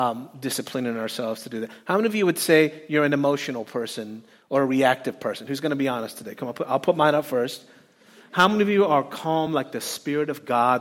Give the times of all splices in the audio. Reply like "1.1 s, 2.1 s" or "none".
none